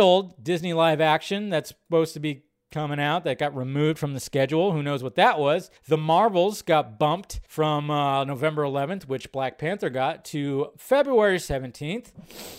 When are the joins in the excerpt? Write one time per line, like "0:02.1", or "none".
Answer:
0:05.8
0:07.5